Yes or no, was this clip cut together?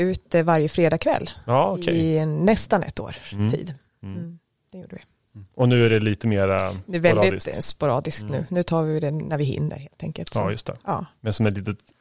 no